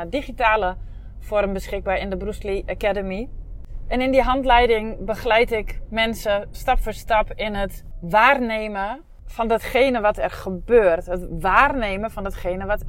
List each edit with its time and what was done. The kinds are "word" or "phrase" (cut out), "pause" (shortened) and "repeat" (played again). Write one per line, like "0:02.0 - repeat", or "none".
0:06.5 - word